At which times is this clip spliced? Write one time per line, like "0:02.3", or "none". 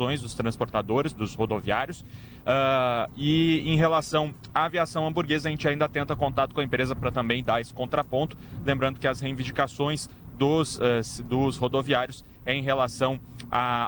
none